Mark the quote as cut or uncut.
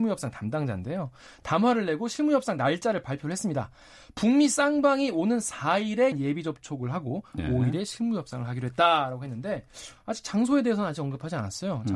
cut